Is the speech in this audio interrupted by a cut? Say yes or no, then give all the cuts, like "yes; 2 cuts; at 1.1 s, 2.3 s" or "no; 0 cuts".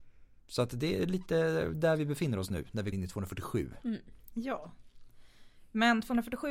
yes; 1 cut; at 2.9 s